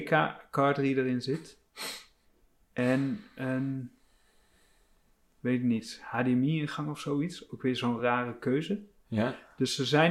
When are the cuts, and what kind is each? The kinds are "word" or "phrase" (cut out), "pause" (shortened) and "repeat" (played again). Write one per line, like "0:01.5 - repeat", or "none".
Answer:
none